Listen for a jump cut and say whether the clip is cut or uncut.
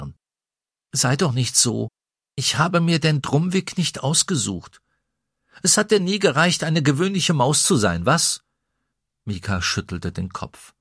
uncut